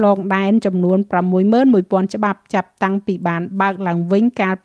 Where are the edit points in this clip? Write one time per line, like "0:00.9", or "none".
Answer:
none

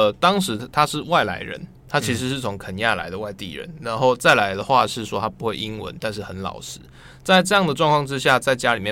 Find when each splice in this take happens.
none

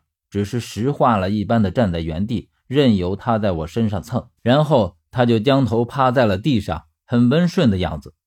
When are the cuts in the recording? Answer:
0:04.4

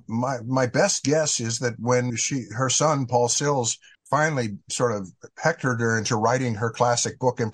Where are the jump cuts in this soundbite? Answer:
0:02.1
0:03.9

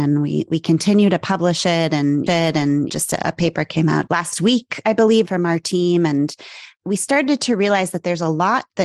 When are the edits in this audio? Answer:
0:02.3
0:04.1
0:05.2

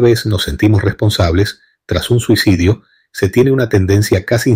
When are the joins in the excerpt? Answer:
none

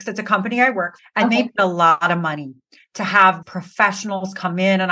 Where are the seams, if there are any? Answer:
0:01.0
0:01.6
0:03.4

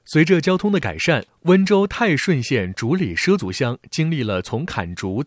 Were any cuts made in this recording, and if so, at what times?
0:01.3

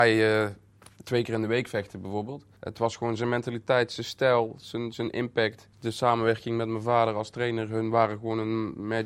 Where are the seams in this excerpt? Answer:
none

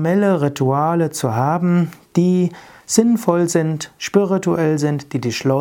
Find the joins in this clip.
none

